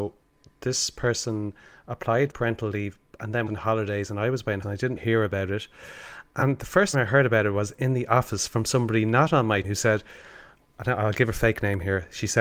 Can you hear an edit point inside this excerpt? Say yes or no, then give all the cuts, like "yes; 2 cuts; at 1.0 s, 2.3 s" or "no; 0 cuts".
yes; 6 cuts; at 2.3 s, 3.5 s, 4.6 s, 5.0 s, 6.9 s, 9.6 s